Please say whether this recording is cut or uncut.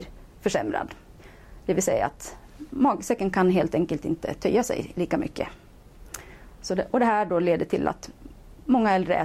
uncut